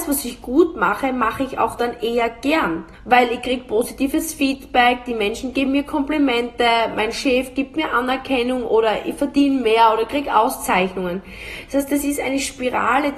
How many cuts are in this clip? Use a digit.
1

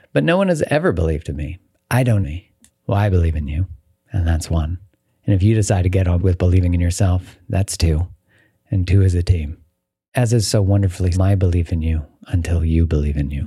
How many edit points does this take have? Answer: 4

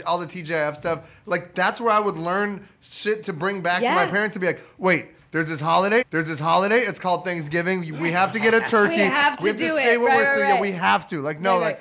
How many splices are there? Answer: 1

